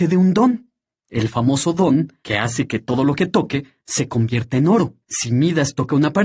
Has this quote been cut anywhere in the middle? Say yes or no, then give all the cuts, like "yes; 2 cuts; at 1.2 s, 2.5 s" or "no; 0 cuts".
yes; 1 cut; at 5.0 s